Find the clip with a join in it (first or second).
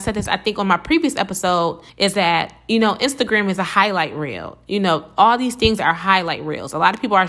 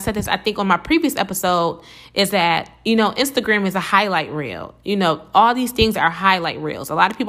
first